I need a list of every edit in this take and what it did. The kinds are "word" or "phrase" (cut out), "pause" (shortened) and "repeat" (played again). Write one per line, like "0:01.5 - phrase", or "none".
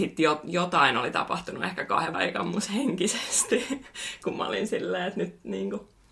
0:02.1 - word